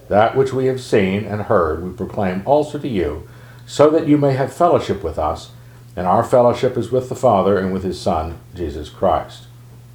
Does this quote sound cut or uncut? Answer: uncut